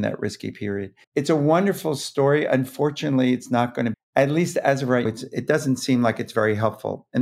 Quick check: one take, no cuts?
no; 3 cuts; at 1.0 s, 3.9 s, 5.1 s

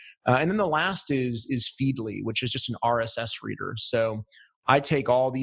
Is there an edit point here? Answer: no; 0 cuts

